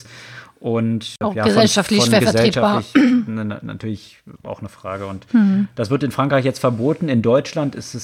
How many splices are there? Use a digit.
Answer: 1